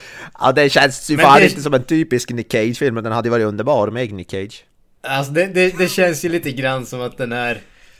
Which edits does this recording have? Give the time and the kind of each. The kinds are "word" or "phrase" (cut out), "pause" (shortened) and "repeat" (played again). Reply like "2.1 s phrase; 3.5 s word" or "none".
none